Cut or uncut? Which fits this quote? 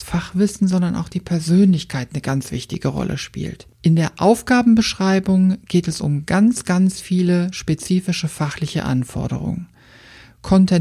uncut